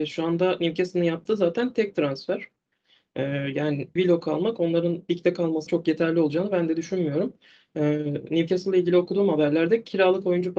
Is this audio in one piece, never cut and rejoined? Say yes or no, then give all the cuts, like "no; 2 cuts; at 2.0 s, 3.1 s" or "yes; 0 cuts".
no; 2 cuts; at 4.0 s, 5.7 s